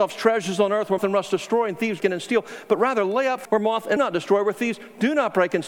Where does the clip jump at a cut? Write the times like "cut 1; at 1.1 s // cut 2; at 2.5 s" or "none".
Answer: cut 1; at 1.0 s // cut 2; at 2.0 s // cut 3; at 3.4 s // cut 4; at 4.0 s